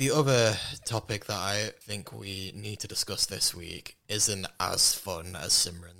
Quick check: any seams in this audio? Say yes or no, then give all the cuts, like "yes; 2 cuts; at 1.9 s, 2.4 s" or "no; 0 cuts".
yes; 1 cut; at 1.8 s